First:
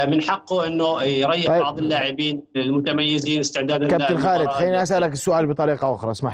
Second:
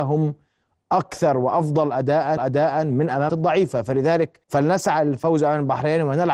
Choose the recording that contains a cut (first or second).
second